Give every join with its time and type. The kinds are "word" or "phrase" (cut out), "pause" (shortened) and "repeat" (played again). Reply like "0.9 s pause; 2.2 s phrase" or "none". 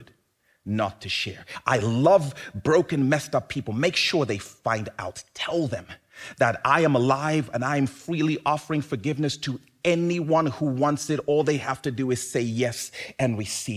none